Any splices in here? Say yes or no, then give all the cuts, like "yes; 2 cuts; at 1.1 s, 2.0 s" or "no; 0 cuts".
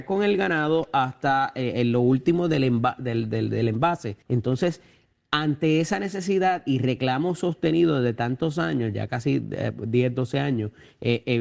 yes; 1 cut; at 4.2 s